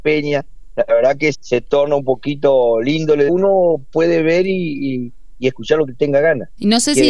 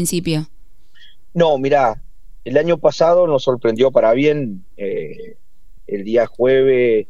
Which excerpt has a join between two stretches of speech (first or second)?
first